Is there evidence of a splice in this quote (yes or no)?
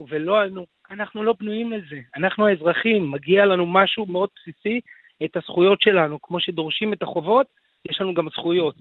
no